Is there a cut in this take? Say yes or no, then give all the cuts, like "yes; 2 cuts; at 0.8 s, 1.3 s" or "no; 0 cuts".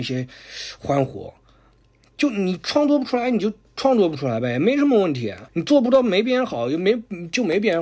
yes; 1 cut; at 5.5 s